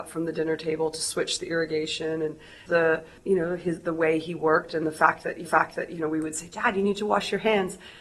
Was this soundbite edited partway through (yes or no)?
yes